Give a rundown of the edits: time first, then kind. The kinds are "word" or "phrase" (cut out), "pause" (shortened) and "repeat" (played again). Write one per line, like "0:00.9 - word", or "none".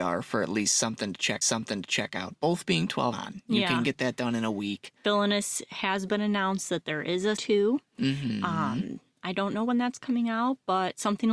0:01.4 - repeat
0:03.1 - phrase
0:05.0 - pause
0:07.4 - word